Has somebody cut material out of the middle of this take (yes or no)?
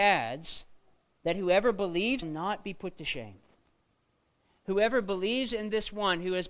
yes